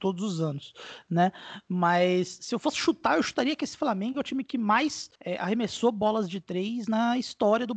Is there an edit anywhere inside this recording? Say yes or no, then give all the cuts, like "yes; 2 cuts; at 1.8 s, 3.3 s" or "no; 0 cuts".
yes; 1 cut; at 5.2 s